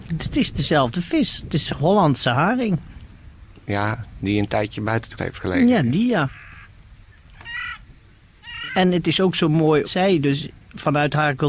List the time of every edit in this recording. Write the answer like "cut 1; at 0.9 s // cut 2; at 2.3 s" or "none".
cut 1; at 5.2 s // cut 2; at 9.8 s